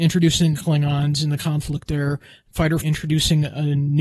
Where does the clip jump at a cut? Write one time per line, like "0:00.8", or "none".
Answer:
0:02.8